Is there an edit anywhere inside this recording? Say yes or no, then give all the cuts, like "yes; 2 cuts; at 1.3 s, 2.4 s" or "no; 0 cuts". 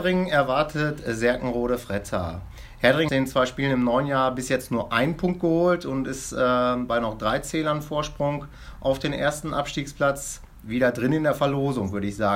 yes; 1 cut; at 3.1 s